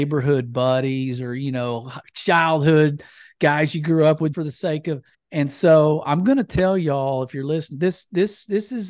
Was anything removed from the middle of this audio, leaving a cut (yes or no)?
yes